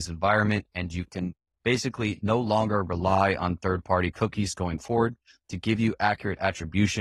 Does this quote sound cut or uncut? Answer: uncut